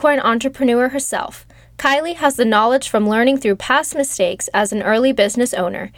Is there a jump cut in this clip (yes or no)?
no